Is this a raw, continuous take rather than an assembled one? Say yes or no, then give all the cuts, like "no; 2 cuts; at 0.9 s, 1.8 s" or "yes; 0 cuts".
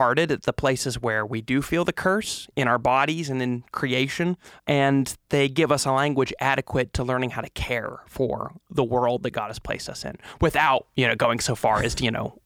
yes; 0 cuts